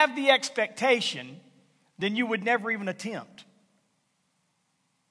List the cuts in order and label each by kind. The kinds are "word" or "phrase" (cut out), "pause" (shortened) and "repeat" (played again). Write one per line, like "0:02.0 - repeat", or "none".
none